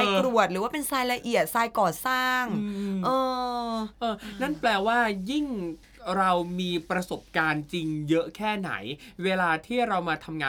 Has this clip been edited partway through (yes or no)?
yes